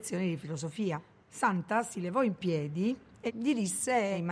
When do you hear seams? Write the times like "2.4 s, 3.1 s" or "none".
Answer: none